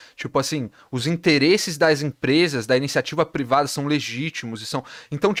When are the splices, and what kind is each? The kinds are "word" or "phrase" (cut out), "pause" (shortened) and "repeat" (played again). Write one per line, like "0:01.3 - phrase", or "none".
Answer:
none